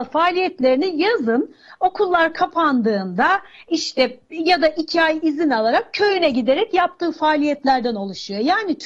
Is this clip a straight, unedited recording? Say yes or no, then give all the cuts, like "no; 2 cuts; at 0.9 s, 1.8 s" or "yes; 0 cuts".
yes; 0 cuts